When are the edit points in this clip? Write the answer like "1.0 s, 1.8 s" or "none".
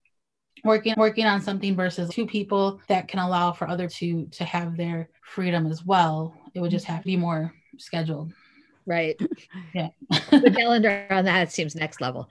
0.9 s, 2.1 s, 2.8 s, 3.9 s, 5.2 s, 7.0 s, 10.5 s